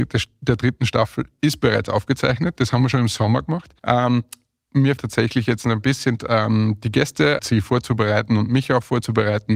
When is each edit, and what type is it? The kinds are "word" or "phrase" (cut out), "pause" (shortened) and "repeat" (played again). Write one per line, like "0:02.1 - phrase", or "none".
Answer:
0:03.8 - pause
0:05.0 - word
0:06.2 - phrase
0:07.4 - phrase

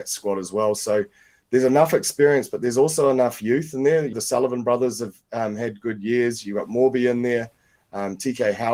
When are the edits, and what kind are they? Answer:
0:04.1 - word

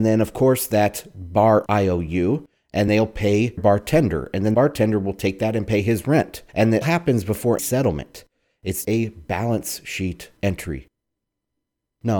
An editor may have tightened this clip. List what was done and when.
0:01.7 - phrase
0:02.9 - word
0:03.6 - word
0:04.5 - word
0:06.5 - pause
0:06.8 - word
0:07.6 - word
0:08.8 - word
0:10.4 - pause

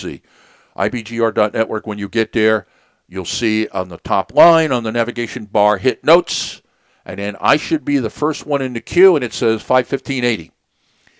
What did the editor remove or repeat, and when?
none

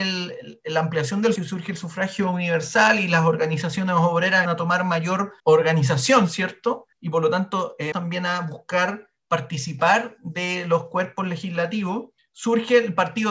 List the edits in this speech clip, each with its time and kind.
0:01.4 - word
0:04.5 - word
0:05.4 - pause
0:06.9 - pause
0:07.9 - word
0:12.2 - pause

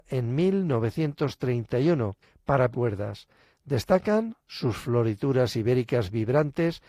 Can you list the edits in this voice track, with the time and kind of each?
0:02.7 - phrase

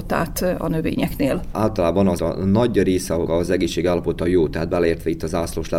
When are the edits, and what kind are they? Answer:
0:02.2 - word
0:03.3 - word

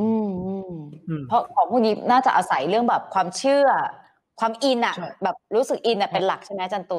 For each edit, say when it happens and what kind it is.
0:05.4 - pause

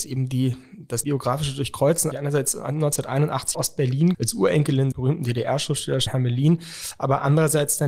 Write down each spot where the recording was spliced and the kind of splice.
0:01.0 - word
0:02.1 - word
0:03.5 - word
0:04.1 - word
0:04.9 - word
0:06.1 - word

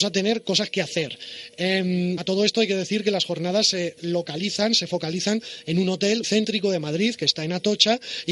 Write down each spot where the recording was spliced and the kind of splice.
0:02.2 - word
0:06.2 - word

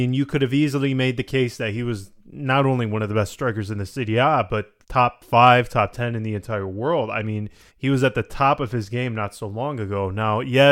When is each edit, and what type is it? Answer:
0:04.8 - pause
0:07.7 - pause

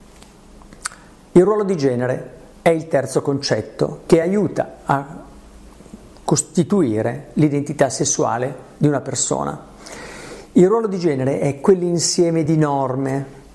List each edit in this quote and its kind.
none

